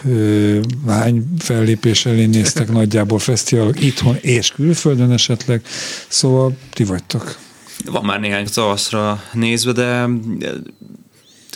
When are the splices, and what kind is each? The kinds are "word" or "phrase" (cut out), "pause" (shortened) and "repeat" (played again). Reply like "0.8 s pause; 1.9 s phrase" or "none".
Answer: 8.5 s word